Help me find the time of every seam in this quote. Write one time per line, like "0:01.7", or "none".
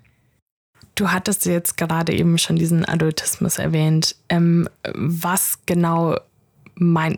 none